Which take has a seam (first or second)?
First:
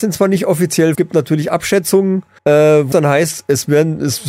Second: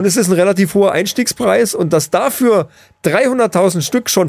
first